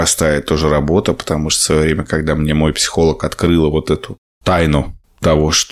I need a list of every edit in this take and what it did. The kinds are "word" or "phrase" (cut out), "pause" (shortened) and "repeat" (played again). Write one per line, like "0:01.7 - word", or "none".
none